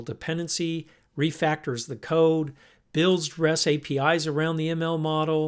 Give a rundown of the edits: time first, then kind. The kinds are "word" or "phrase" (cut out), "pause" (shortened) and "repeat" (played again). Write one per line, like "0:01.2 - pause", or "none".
none